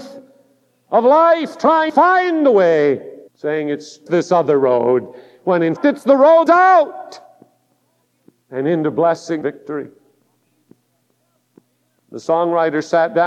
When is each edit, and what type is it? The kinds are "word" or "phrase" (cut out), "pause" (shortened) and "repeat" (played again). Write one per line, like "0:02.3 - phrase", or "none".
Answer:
0:01.9 - word
0:03.3 - pause
0:04.1 - word
0:05.8 - word
0:06.5 - phrase
0:09.4 - word